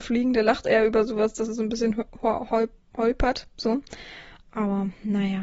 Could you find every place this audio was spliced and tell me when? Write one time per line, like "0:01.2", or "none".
none